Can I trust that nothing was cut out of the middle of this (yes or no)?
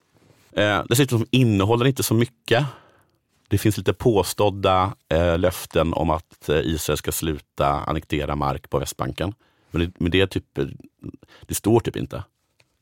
yes